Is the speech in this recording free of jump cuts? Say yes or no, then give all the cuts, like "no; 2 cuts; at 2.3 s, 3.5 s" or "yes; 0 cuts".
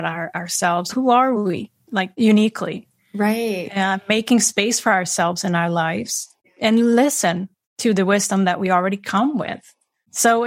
yes; 0 cuts